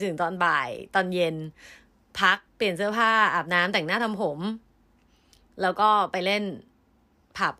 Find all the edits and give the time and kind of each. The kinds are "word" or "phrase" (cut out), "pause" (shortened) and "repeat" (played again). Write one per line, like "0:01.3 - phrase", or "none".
0:02.5 - pause